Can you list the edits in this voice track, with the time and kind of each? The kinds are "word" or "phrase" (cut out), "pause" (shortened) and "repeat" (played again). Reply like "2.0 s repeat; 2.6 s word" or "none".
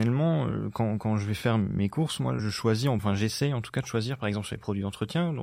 2.4 s word; 3.0 s word

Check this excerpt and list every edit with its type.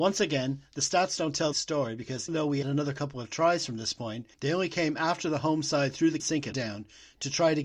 1.5 s phrase; 2.3 s word; 2.6 s word; 4.3 s pause; 6.2 s word; 6.5 s phrase

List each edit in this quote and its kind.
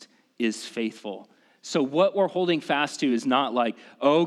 none

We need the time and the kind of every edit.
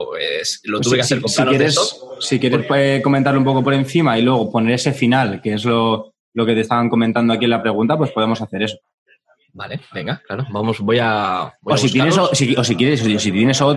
none

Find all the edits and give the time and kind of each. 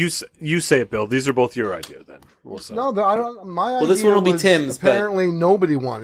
none

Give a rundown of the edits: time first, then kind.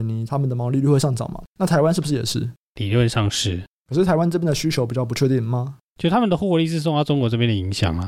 1.5 s pause

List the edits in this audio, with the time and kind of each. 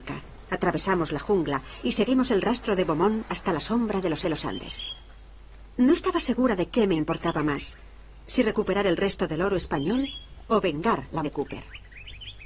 4.2 s repeat; 11.2 s word

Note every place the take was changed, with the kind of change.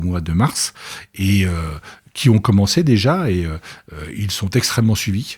none

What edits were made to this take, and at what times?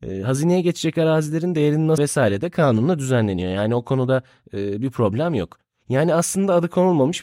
2.0 s word

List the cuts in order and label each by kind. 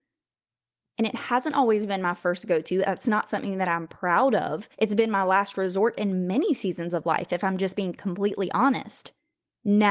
4.7 s pause

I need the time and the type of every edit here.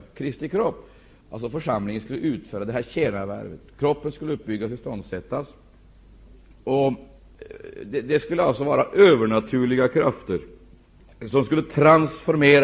none

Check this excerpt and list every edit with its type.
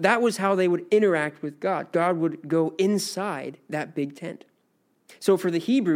none

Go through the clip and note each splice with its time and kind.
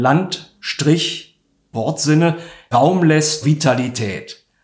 1.7 s word; 2.7 s word; 3.4 s word

